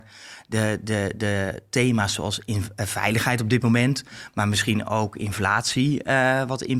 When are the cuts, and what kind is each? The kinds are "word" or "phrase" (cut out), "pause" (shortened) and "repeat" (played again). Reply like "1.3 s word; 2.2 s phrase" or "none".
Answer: none